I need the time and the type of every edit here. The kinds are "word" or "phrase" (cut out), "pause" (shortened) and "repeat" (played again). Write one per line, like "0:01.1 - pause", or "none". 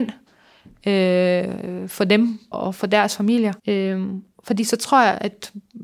0:02.5 - word
0:03.6 - pause